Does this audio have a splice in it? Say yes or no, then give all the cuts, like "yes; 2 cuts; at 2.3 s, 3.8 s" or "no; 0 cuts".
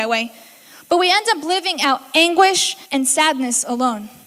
yes; 1 cut; at 2.8 s